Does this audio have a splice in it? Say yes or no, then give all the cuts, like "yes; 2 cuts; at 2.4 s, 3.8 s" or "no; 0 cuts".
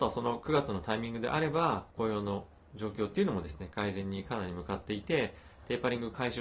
yes; 1 cut; at 1.9 s